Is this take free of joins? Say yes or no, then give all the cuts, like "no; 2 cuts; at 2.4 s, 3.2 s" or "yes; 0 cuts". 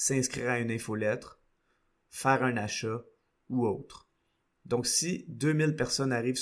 yes; 0 cuts